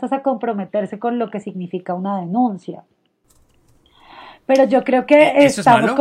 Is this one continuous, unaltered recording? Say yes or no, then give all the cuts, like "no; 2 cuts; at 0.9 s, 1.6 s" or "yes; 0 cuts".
yes; 0 cuts